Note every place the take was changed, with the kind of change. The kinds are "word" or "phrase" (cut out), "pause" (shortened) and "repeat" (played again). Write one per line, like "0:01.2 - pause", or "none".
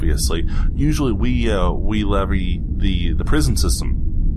none